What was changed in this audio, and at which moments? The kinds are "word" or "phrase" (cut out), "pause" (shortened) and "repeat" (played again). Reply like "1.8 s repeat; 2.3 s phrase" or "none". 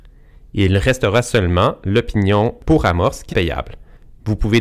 3.3 s word